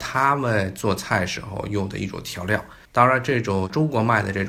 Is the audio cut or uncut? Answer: cut